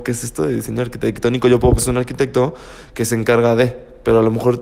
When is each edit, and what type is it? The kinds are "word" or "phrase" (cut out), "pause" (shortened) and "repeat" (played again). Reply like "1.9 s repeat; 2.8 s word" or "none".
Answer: 1.8 s word